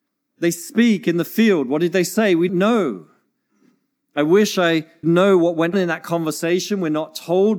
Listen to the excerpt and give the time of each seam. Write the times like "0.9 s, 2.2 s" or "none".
2.5 s, 5.0 s, 5.7 s